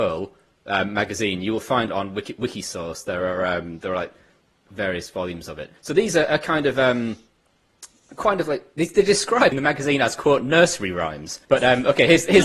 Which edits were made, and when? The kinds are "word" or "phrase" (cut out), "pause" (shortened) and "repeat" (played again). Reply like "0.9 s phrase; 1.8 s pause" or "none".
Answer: 1.9 s word; 5.8 s pause; 9.5 s word; 11.4 s pause